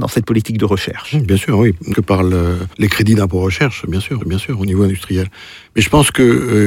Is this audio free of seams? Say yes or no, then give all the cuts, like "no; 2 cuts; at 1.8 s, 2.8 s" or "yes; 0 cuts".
no; 3 cuts; at 1.9 s, 2.7 s, 4.2 s